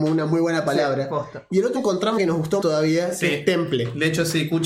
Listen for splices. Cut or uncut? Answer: cut